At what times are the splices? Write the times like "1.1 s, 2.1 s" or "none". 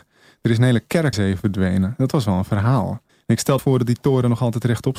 1.1 s, 3.1 s, 3.6 s